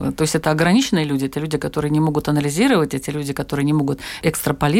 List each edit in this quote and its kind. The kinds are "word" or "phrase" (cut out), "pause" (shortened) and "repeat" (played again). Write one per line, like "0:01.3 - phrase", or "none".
none